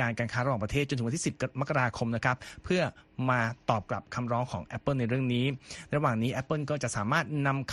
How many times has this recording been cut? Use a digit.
0